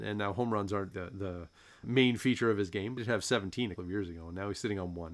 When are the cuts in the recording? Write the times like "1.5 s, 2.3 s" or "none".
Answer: 0.9 s, 1.8 s, 3.0 s, 3.8 s